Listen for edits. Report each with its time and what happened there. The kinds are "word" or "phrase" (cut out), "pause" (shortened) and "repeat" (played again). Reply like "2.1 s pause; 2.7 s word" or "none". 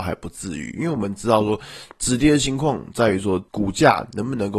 3.5 s pause